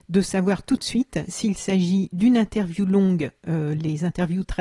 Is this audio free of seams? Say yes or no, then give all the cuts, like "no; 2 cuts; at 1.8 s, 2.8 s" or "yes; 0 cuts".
yes; 0 cuts